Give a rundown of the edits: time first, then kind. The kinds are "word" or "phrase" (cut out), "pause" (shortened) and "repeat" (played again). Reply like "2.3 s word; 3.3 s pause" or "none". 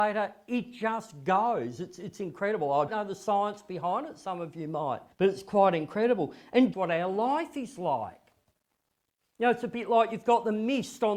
2.9 s word; 5.1 s pause; 6.7 s phrase